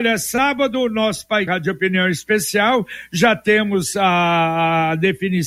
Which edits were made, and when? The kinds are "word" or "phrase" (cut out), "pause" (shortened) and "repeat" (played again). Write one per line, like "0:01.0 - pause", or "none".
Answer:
0:01.5 - word